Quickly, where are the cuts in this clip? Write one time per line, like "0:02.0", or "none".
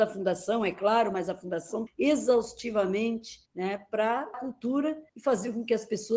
0:01.9
0:03.5
0:04.3
0:05.1